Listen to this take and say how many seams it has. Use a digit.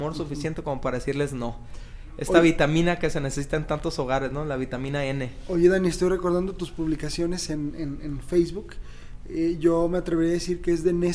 0